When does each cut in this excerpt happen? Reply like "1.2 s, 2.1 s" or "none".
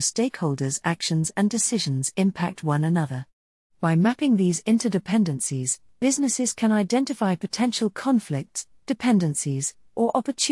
none